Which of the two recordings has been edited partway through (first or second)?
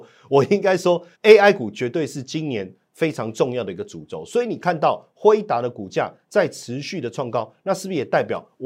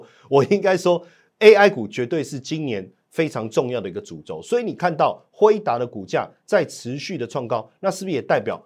first